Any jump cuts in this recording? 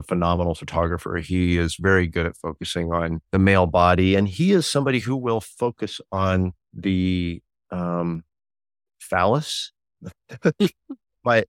yes; 3 cuts; at 3.2 s, 6.6 s, 8.5 s

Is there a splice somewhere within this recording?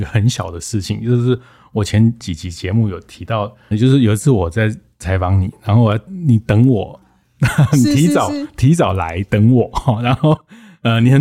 yes; 1 cut; at 3.7 s

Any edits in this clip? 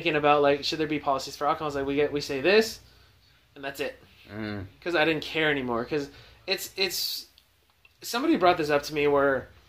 no; 0 cuts

